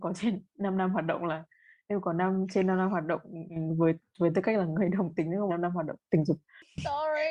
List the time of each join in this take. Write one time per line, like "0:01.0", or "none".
0:05.5